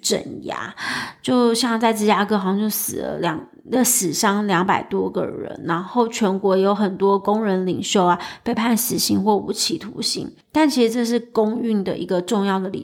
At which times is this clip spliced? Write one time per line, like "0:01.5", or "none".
0:10.4